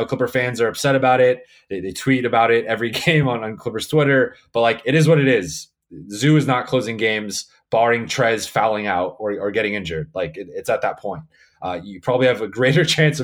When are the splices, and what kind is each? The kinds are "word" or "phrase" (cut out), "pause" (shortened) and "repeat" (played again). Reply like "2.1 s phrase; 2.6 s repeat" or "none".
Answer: none